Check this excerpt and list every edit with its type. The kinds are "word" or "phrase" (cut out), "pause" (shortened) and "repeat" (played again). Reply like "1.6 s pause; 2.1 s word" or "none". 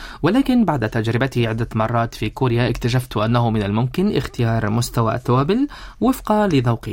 none